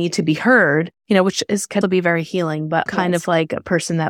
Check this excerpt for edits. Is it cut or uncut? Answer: cut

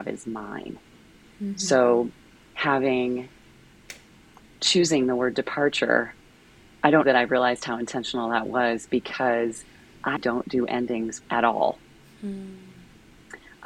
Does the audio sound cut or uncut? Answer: cut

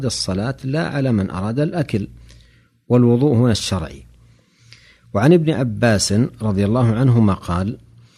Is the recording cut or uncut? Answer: uncut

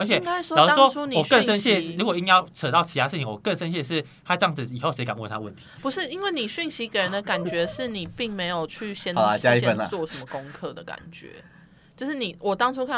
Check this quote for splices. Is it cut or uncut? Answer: uncut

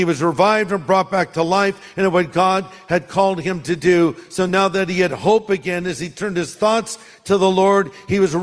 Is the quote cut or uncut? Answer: uncut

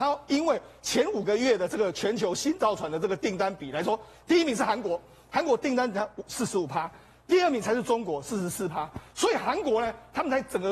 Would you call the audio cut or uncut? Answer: uncut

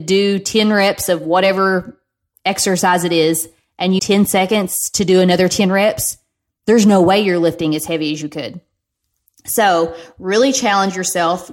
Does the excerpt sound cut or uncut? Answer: cut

